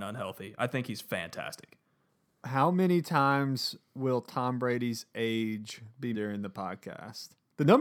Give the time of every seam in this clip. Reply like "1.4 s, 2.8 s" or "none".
6.1 s